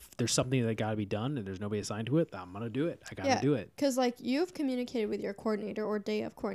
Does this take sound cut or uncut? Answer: uncut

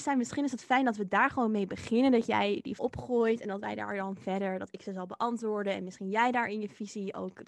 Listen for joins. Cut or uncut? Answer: cut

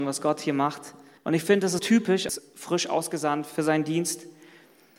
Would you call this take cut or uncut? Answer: cut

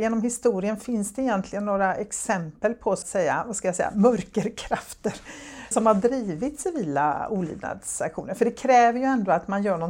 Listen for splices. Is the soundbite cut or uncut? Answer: cut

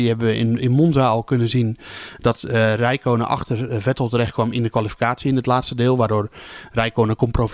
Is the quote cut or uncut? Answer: uncut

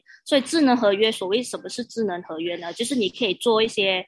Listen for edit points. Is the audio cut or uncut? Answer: uncut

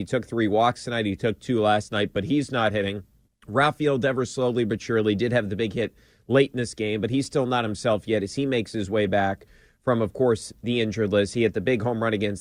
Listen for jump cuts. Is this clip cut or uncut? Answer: cut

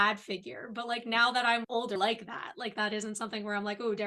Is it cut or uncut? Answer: cut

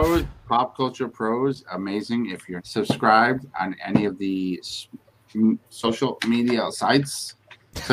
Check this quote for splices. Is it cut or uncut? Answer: cut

